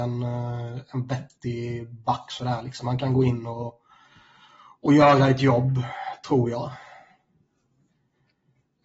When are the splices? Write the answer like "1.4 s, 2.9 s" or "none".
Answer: none